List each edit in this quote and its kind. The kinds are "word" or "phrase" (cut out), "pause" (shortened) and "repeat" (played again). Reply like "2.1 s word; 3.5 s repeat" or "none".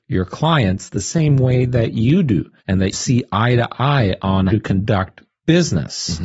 2.6 s pause; 2.9 s word; 4.5 s word